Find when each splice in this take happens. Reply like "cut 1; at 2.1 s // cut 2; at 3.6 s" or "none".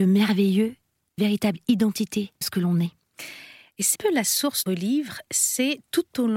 cut 1; at 1.2 s // cut 2; at 2.4 s // cut 3; at 4.0 s // cut 4; at 4.7 s

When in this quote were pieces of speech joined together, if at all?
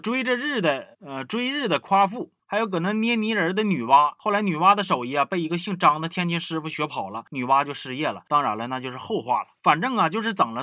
cut 1; at 0.9 s

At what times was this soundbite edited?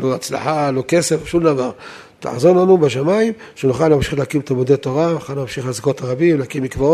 none

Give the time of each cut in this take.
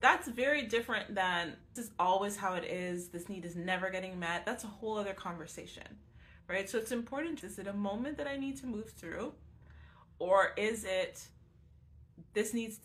cut 1; at 1.8 s // cut 2; at 7.4 s

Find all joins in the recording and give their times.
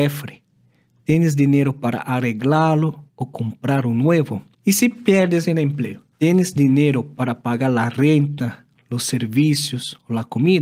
cut 1; at 3.1 s // cut 2; at 4.5 s // cut 3; at 6.1 s

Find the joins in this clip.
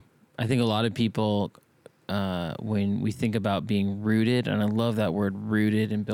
none

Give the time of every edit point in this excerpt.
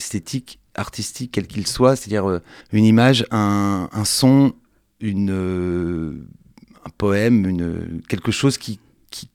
cut 1; at 2.6 s

